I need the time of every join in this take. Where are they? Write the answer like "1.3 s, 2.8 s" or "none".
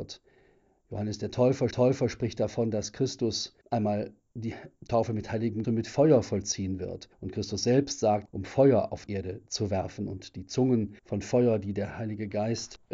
1.7 s, 3.6 s, 5.6 s, 7.1 s, 8.2 s, 9.1 s, 11.0 s